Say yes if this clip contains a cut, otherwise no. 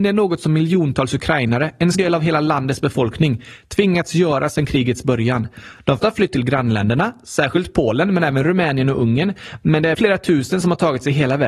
yes